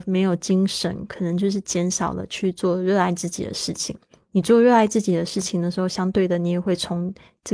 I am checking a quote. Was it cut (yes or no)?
no